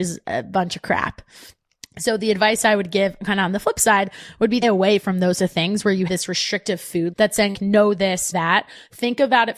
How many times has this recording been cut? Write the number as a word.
six